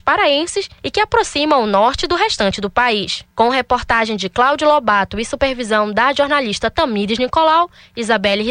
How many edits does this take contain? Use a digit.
1